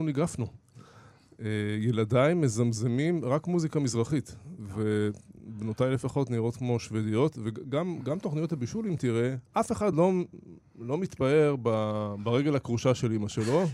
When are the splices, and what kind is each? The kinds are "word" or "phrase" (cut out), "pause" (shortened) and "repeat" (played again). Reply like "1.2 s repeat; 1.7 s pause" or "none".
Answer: none